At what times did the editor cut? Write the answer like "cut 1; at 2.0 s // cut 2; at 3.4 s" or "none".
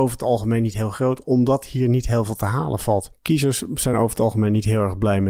none